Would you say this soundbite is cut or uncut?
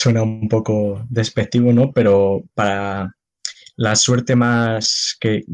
uncut